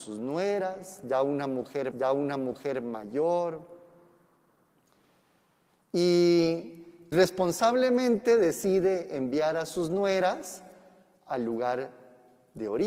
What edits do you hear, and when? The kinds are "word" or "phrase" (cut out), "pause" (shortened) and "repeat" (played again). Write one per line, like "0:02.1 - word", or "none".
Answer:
0:01.9 - repeat
0:07.1 - word